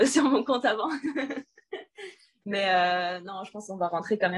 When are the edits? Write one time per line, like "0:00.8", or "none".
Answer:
none